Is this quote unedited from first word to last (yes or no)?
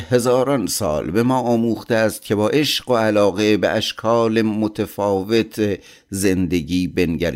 yes